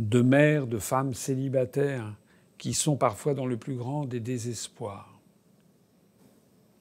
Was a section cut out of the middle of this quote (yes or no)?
no